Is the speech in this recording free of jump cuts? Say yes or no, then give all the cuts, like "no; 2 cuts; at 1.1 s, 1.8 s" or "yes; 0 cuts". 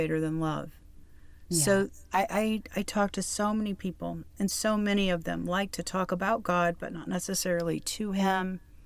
yes; 0 cuts